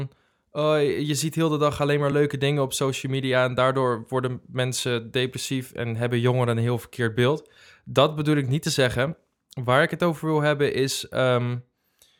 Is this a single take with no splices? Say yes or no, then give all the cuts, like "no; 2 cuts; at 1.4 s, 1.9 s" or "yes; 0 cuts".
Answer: yes; 0 cuts